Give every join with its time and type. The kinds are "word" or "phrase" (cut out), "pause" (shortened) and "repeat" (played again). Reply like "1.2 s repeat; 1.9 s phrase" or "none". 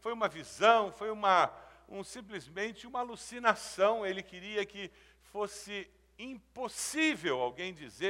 none